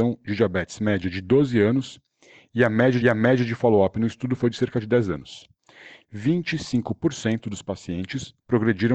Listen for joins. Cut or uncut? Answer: cut